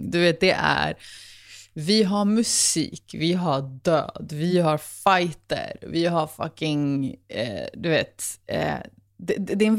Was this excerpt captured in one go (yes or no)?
yes